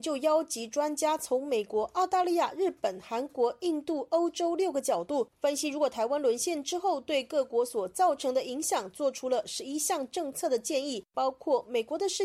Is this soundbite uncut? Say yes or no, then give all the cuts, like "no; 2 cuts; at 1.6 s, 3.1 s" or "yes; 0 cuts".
yes; 0 cuts